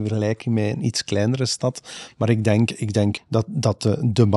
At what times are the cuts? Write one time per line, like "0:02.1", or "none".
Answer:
0:03.2